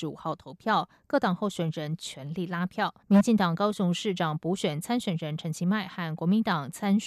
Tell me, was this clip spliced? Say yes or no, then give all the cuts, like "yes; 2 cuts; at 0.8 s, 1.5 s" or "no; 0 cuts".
yes; 1 cut; at 3.0 s